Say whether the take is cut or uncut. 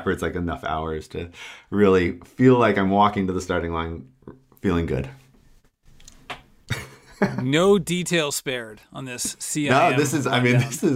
uncut